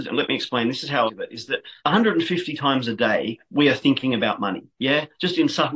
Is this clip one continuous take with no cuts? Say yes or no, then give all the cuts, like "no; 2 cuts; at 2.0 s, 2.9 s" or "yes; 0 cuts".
no; 3 cuts; at 1.1 s, 1.8 s, 4.7 s